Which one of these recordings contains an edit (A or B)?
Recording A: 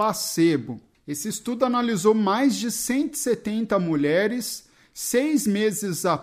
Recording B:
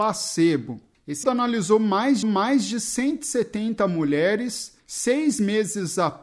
B